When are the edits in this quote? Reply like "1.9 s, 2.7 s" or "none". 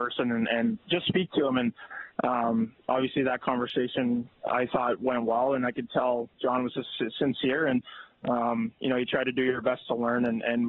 none